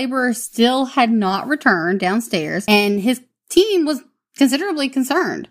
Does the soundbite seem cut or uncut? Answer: uncut